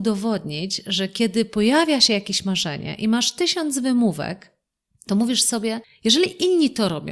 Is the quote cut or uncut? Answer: uncut